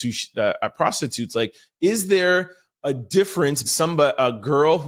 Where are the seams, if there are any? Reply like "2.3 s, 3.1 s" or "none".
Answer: 3.6 s

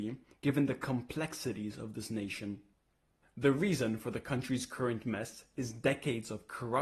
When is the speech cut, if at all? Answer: none

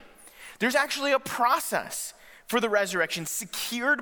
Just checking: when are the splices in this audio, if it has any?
none

